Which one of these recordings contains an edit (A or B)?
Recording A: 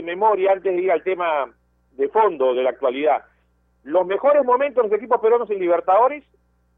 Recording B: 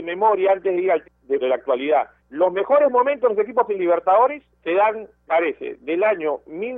B